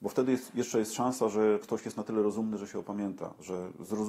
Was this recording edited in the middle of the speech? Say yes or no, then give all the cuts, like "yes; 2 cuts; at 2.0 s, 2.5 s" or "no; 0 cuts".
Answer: yes; 1 cut; at 1.6 s